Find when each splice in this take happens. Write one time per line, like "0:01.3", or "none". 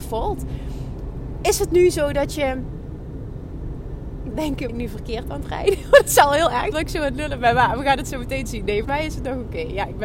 0:04.3
0:04.7
0:06.7
0:08.8